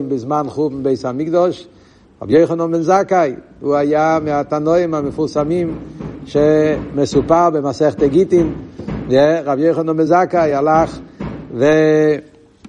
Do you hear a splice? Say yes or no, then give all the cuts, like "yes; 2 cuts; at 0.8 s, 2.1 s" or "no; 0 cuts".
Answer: no; 0 cuts